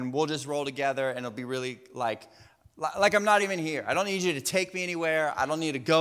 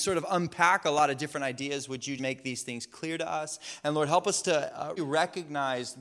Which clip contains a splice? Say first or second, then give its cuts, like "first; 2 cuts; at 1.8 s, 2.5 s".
second; 2 cuts; at 2.2 s, 5.0 s